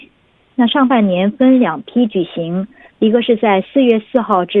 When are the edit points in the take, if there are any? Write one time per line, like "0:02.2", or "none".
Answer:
none